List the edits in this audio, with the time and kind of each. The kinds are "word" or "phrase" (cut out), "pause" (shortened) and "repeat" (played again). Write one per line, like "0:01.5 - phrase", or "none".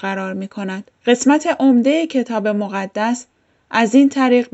0:01.0 - pause